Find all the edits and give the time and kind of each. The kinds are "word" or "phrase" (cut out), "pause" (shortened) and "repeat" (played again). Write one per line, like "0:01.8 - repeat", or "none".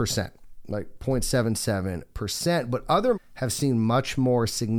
0:03.1 - word

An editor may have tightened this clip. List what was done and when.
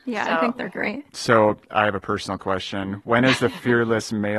0:01.1 - pause

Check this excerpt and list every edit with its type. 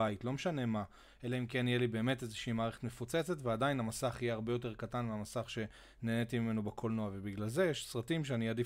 none

